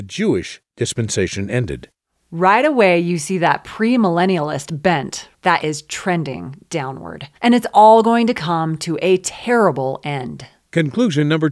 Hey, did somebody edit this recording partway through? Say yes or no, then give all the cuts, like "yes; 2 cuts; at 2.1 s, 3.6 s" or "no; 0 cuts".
yes; 2 cuts; at 5.6 s, 7.4 s